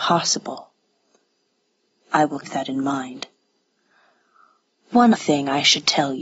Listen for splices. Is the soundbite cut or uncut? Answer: cut